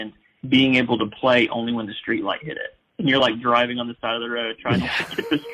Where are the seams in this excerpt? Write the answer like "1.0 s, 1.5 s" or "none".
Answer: none